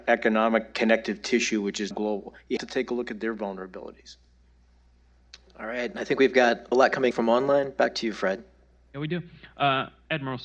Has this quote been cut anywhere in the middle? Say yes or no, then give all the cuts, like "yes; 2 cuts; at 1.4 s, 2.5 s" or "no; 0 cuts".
yes; 4 cuts; at 1.9 s, 2.6 s, 6.7 s, 7.1 s